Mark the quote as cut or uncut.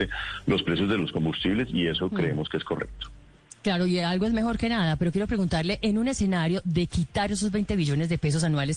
uncut